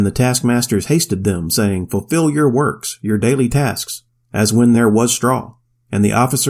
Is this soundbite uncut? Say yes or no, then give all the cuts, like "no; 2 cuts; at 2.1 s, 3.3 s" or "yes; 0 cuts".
yes; 0 cuts